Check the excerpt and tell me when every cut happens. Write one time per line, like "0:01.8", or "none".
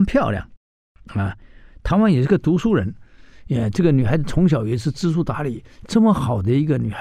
none